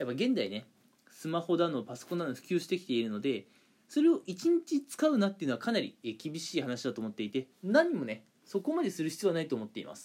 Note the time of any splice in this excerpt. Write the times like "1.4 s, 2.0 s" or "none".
7.5 s